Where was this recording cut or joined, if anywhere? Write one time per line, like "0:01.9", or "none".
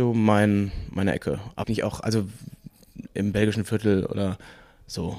0:01.6